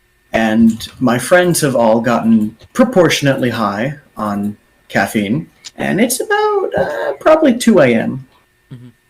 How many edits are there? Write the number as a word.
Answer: two